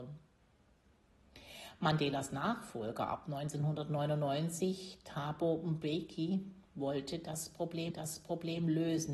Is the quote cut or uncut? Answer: cut